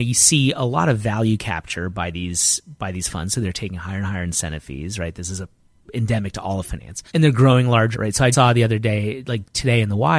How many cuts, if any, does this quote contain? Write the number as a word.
three